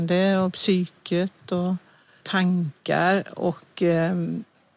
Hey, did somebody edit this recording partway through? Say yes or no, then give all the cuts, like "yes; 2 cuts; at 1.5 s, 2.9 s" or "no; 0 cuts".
yes; 1 cut; at 2.2 s